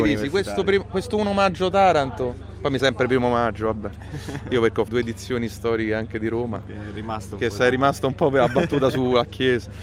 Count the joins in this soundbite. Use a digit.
2